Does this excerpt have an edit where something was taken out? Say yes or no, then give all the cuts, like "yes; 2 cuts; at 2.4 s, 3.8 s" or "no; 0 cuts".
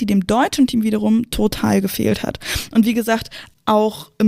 no; 0 cuts